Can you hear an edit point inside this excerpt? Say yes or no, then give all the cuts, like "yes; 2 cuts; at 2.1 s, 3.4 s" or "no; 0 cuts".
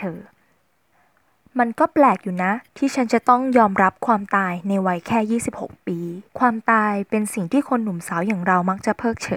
yes; 3 cuts; at 0.9 s, 2.7 s, 6.3 s